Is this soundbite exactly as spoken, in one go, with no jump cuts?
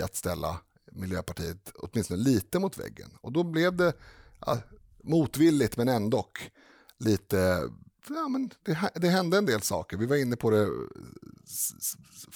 yes; 0 cuts

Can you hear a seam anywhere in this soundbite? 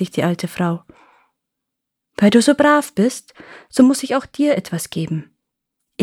no; 0 cuts

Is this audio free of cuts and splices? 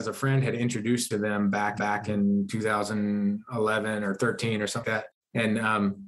no; 3 cuts; at 1.1 s, 1.8 s, 4.8 s

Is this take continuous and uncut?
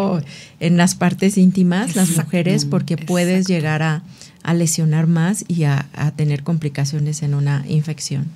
yes; 0 cuts

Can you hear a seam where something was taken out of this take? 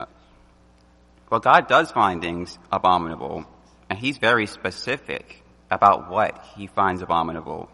no; 0 cuts

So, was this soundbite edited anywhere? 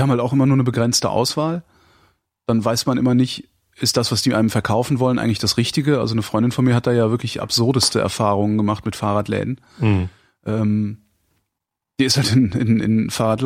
no; 0 cuts

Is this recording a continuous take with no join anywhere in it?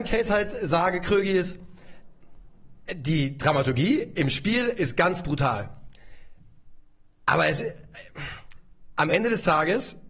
yes; 0 cuts

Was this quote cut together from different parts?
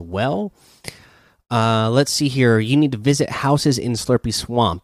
no; 0 cuts

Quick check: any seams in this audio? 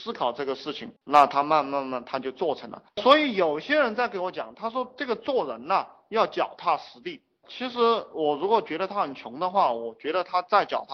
yes; 1 cut; at 1.0 s

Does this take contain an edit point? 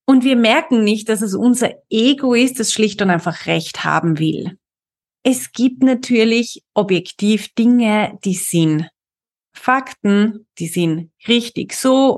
no; 0 cuts

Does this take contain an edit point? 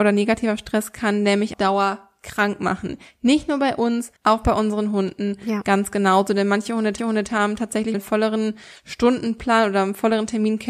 yes; 4 cuts; at 1.5 s, 4.2 s, 7.0 s, 7.9 s

